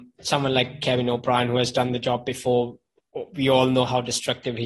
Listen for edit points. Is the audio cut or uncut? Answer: uncut